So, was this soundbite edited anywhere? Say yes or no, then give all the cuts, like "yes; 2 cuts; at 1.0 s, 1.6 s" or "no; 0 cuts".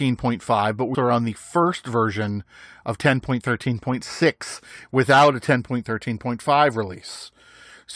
yes; 1 cut; at 0.9 s